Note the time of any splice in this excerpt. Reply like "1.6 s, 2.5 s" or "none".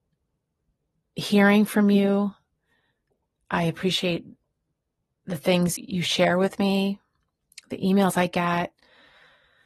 5.8 s